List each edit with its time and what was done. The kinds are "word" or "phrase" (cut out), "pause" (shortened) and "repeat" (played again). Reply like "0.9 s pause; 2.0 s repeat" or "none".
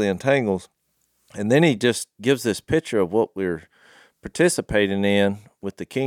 none